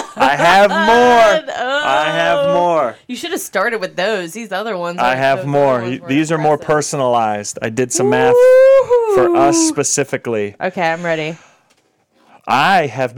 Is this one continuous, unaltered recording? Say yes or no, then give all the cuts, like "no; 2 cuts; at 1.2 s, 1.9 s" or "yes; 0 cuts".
yes; 0 cuts